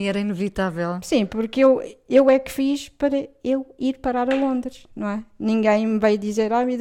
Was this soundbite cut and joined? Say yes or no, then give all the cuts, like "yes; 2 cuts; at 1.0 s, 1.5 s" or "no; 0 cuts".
no; 0 cuts